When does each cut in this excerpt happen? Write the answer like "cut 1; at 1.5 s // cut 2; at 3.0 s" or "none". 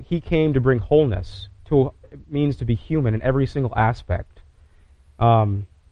cut 1; at 2.0 s